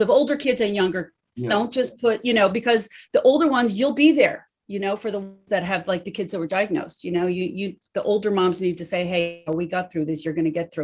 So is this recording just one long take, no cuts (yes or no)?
no